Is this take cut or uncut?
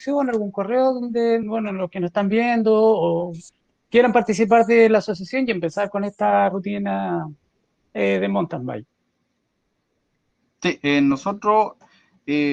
uncut